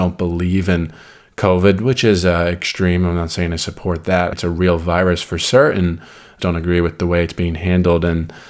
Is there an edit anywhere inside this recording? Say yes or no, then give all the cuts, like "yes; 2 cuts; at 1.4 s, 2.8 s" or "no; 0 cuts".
yes; 2 cuts; at 4.3 s, 6.4 s